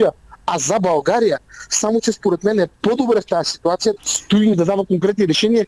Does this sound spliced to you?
yes; 2 cuts; at 4.0 s, 4.5 s

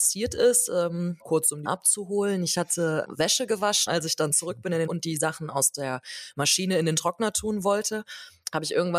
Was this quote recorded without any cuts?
no; 5 cuts; at 1.2 s, 1.7 s, 3.0 s, 3.9 s, 4.9 s

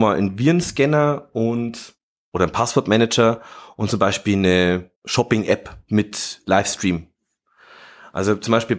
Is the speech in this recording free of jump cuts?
no; 1 cut; at 5.0 s

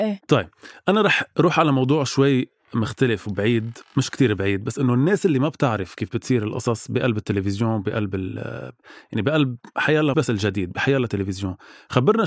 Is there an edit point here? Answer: yes; 1 cut; at 10.1 s

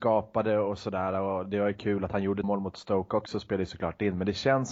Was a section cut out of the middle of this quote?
yes; 1 cut; at 2.4 s

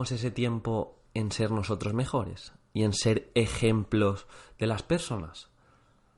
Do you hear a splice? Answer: no; 0 cuts

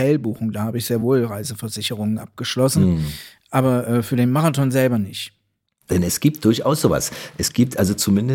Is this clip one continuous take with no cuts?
yes; 0 cuts

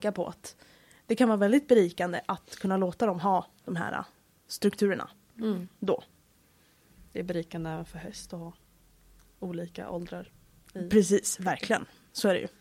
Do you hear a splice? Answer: no; 0 cuts

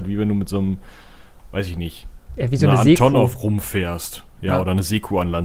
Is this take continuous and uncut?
no; 1 cut; at 2.2 s

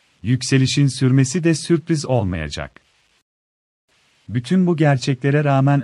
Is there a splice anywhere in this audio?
no; 0 cuts

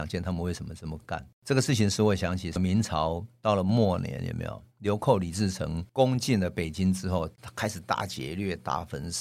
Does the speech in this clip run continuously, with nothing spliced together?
no; 3 cuts; at 1.3 s, 4.7 s, 7.3 s

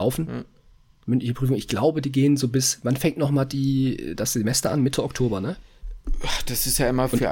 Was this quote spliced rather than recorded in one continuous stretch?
no; 0 cuts

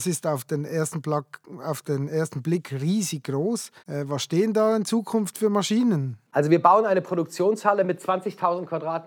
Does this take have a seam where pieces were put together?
yes; 2 cuts; at 3.8 s, 6.3 s

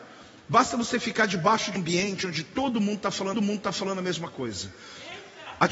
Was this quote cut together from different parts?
yes; 2 cuts; at 1.8 s, 3.3 s

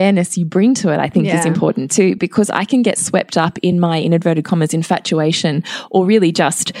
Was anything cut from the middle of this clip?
no; 0 cuts

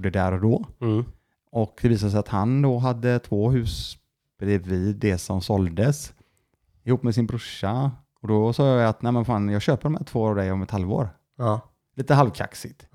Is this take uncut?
yes; 0 cuts

